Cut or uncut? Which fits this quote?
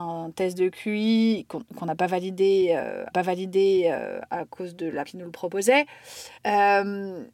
cut